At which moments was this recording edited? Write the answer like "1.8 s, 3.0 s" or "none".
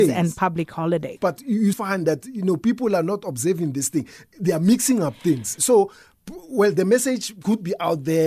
1.2 s, 1.7 s, 5.6 s